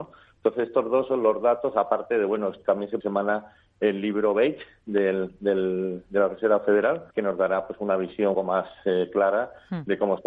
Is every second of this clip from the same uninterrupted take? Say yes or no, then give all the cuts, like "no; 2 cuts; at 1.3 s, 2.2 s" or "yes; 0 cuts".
no; 3 cuts; at 3.0 s, 7.1 s, 8.3 s